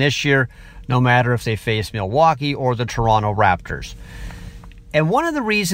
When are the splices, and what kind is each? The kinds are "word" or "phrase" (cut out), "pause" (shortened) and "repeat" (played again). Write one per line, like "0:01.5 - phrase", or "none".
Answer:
none